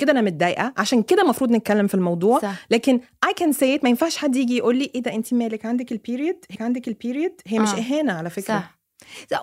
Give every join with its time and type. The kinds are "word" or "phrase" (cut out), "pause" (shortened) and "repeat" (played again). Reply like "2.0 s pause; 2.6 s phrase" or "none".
6.5 s repeat